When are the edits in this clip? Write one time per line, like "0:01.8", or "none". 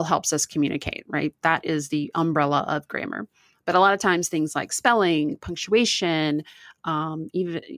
none